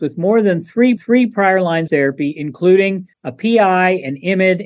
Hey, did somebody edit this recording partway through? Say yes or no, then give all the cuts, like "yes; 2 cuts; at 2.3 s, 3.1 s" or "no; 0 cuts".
yes; 3 cuts; at 1.0 s, 1.9 s, 3.1 s